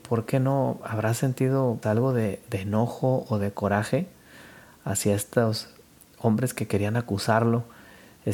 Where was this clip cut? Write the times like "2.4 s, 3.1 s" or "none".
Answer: 1.8 s